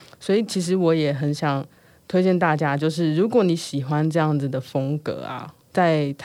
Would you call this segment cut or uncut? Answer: uncut